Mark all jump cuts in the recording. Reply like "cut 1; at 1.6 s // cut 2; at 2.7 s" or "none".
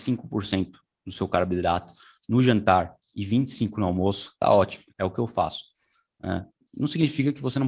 none